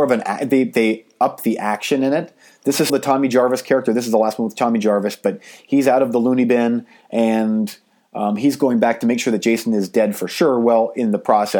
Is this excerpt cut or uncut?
cut